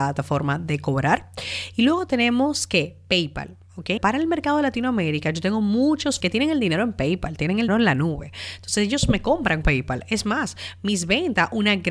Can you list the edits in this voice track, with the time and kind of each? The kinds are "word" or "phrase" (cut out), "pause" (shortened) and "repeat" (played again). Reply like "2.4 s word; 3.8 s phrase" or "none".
4.0 s word; 6.2 s word; 7.7 s word; 9.6 s word